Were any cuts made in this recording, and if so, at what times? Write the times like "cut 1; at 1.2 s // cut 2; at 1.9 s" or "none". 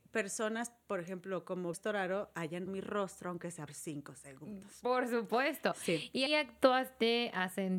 cut 1; at 1.7 s // cut 2; at 2.7 s // cut 3; at 3.7 s // cut 4; at 6.3 s

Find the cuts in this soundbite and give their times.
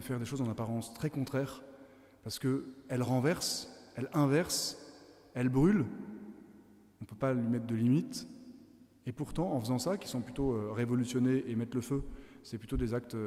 none

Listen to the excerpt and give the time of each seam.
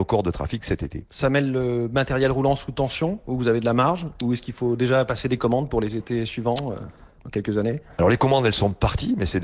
none

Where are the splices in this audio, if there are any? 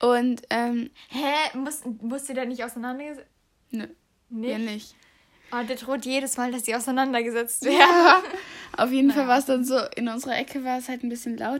none

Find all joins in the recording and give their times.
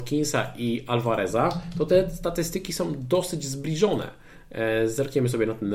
none

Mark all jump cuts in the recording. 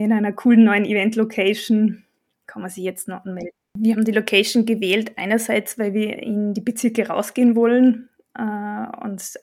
cut 1; at 2.3 s

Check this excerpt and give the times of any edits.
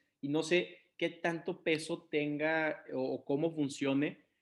none

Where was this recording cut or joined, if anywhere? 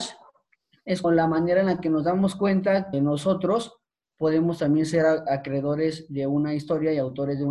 cut 1; at 1.0 s // cut 2; at 2.9 s

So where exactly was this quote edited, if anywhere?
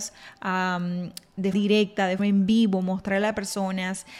cut 1; at 1.5 s // cut 2; at 2.2 s

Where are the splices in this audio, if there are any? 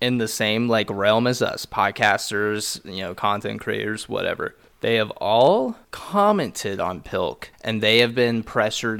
cut 1; at 4.7 s // cut 2; at 5.8 s // cut 3; at 7.5 s

